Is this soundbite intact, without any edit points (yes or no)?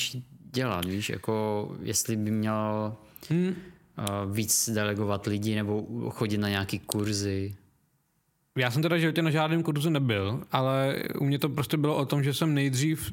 yes